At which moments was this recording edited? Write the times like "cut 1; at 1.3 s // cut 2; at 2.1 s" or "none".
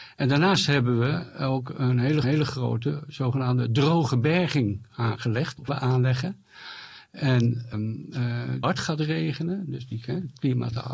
cut 1; at 2.2 s // cut 2; at 5.7 s // cut 3; at 7.7 s // cut 4; at 8.6 s